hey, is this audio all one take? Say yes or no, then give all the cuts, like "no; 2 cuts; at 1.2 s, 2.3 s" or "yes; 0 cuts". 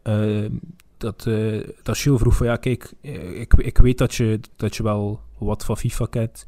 yes; 0 cuts